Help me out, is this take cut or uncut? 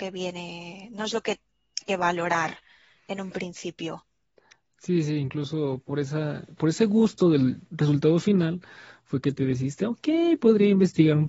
cut